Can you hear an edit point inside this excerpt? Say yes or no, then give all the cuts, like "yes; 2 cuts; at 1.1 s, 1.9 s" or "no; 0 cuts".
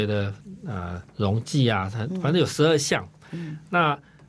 yes; 1 cut; at 1.1 s